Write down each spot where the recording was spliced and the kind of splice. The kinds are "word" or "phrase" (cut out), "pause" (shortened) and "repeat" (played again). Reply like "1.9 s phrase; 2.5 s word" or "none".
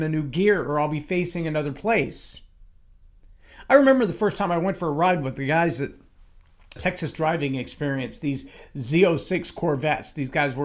6.8 s word

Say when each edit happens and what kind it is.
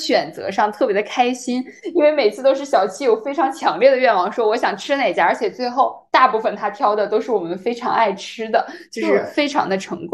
6.1 s pause

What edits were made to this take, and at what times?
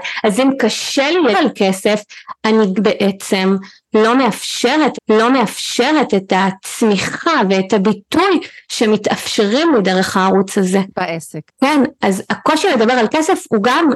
1.3 s word; 2.7 s word; 4.9 s repeat; 11.5 s pause

